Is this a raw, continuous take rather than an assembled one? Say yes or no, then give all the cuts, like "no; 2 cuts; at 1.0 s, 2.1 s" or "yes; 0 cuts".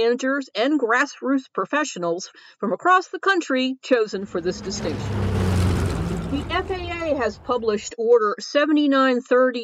yes; 0 cuts